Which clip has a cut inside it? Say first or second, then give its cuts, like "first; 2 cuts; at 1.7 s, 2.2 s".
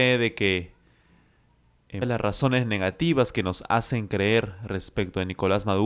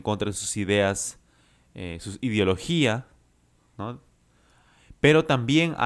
first; 1 cut; at 2.0 s